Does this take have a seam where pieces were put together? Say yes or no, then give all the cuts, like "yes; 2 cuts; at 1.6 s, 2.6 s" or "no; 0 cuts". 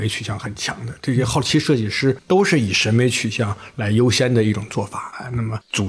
no; 0 cuts